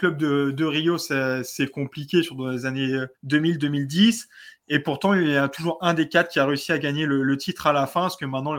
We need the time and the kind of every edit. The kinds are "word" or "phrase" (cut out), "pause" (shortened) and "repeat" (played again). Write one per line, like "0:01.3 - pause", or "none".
0:03.1 - pause